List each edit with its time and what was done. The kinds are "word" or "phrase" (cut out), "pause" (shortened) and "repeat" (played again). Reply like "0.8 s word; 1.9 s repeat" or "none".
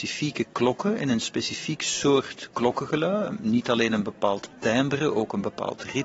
none